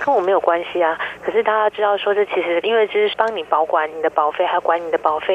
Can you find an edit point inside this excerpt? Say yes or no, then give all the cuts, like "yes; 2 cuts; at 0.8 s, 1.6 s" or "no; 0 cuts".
no; 0 cuts